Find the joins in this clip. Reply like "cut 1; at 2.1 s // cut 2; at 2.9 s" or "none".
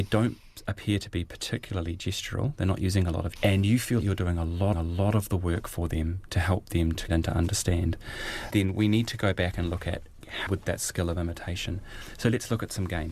cut 1; at 3.4 s // cut 2; at 4.0 s // cut 3; at 4.7 s // cut 4; at 7.1 s // cut 5; at 8.5 s // cut 6; at 10.5 s